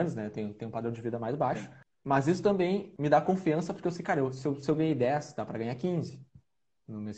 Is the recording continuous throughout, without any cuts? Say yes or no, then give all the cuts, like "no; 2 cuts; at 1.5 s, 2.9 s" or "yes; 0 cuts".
yes; 0 cuts